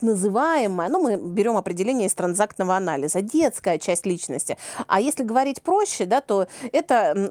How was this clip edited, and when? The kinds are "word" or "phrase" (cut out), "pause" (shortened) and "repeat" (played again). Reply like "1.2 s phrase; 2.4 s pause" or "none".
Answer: none